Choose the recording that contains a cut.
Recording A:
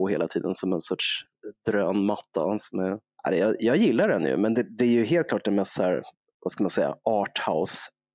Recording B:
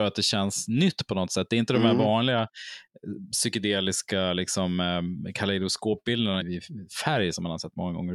B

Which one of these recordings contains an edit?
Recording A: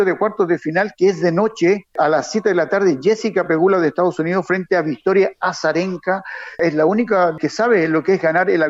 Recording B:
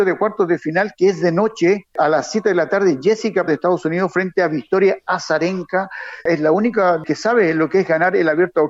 B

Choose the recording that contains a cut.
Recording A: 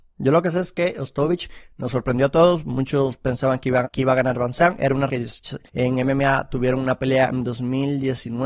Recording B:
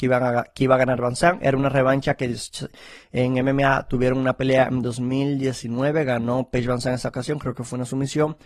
A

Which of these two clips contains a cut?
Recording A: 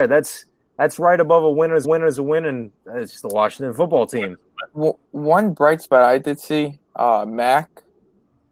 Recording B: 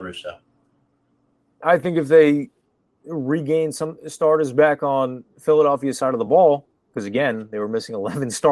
A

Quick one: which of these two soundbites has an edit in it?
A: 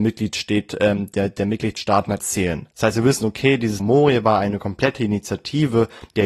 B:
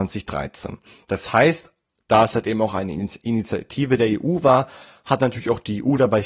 A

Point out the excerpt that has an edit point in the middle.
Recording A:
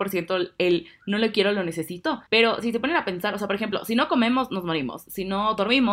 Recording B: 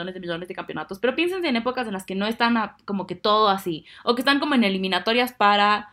A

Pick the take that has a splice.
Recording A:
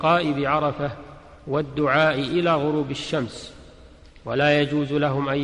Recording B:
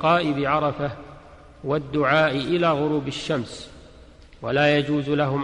A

